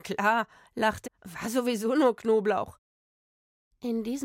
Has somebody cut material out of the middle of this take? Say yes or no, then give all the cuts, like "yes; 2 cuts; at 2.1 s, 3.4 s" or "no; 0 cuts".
yes; 1 cut; at 1.0 s